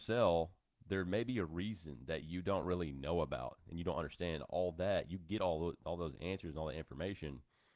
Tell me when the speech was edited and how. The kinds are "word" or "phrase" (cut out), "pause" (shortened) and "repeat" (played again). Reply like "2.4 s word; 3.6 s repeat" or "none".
none